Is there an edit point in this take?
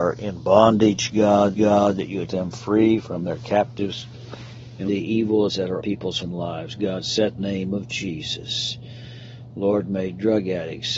yes; 7 cuts; at 1.5 s, 2.3 s, 4.9 s, 5.5 s, 5.8 s, 6.2 s, 7.4 s

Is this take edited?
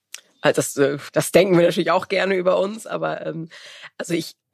yes; 1 cut; at 1.1 s

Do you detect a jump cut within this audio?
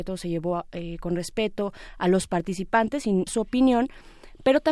yes; 1 cut; at 3.3 s

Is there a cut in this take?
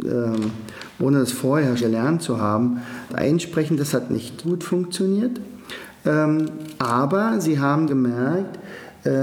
yes; 4 cuts; at 1.8 s, 3.1 s, 4.4 s, 7.9 s

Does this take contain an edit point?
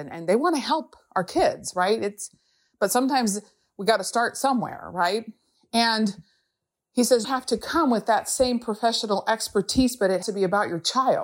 yes; 2 cuts; at 7.2 s, 10.2 s

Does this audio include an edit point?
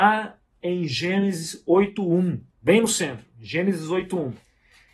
yes; 1 cut; at 2.5 s

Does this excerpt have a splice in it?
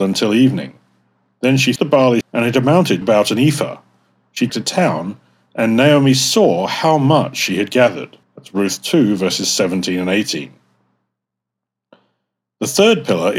yes; 5 cuts; at 1.8 s, 2.2 s, 3.0 s, 4.5 s, 8.2 s

